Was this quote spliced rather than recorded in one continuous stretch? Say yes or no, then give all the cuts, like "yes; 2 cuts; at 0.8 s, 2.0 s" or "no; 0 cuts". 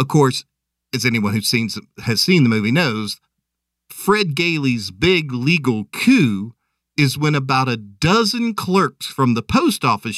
no; 0 cuts